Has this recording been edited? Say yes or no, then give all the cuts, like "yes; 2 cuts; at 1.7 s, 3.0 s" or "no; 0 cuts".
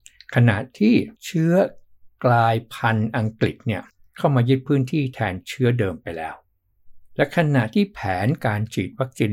yes; 2 cuts; at 1.1 s, 3.9 s